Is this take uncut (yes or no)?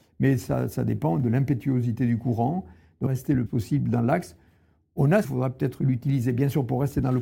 no